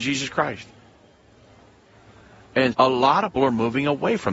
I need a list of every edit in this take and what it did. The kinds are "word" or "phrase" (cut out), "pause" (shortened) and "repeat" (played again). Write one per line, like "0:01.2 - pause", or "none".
0:02.7 - word
0:03.4 - word